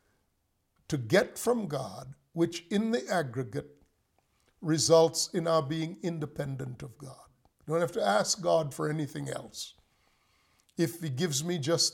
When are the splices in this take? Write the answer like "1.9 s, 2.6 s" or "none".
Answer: 7.5 s